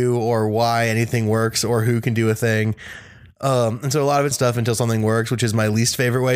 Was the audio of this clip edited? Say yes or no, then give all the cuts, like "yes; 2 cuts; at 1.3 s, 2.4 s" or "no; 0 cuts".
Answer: yes; 1 cut; at 4.3 s